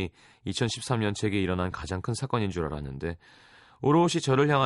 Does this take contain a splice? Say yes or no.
no